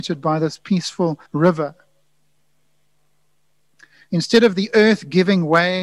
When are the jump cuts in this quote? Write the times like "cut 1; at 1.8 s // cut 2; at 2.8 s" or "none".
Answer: cut 1; at 1.3 s